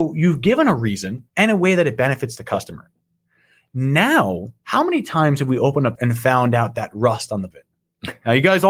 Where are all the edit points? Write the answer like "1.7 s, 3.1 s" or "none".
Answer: 1.3 s, 4.6 s, 6.0 s, 7.5 s